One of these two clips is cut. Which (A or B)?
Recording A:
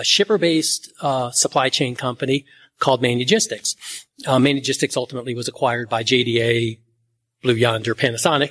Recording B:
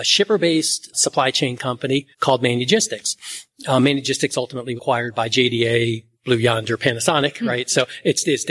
B